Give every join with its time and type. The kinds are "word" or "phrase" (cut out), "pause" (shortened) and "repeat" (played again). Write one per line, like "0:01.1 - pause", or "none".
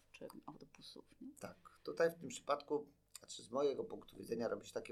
none

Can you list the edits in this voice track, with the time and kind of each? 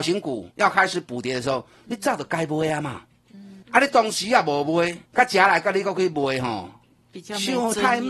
0:03.6 - pause
0:05.1 - pause

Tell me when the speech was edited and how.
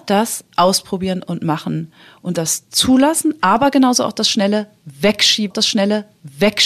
0:05.5 - repeat

